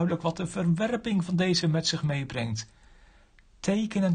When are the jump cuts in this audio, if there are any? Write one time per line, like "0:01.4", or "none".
0:01.6

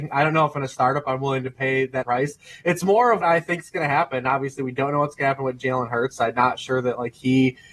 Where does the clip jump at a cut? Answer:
0:02.0
0:03.2

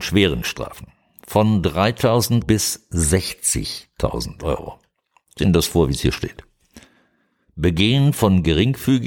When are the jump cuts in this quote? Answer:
0:02.4
0:05.4

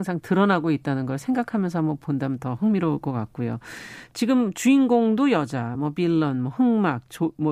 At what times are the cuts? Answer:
none

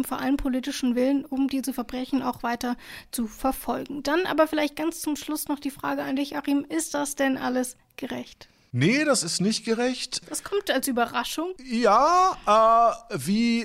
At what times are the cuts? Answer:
none

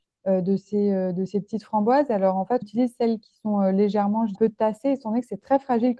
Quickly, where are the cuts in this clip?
0:02.6
0:04.3

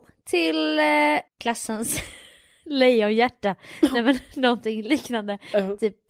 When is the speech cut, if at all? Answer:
0:01.3

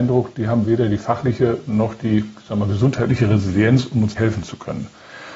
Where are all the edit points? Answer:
0:04.1

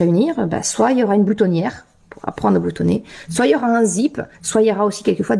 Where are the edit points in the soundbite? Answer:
0:04.3

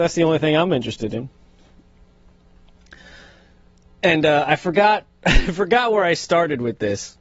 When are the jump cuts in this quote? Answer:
none

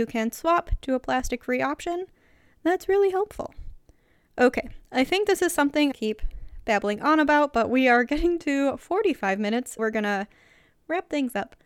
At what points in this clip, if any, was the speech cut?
0:05.9
0:09.8

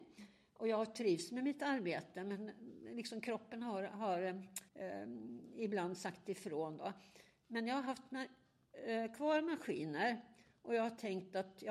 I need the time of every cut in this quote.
0:04.7

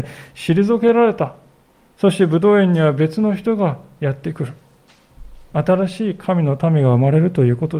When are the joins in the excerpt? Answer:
0:01.7
0:05.4

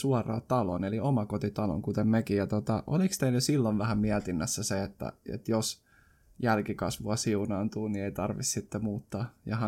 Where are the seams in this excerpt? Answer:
none

